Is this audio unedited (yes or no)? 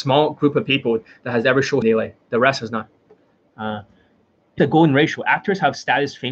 no